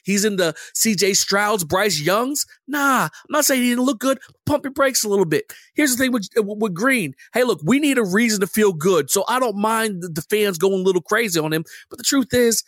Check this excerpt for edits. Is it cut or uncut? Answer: uncut